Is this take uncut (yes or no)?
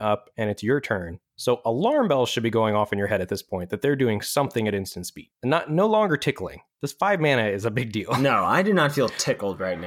yes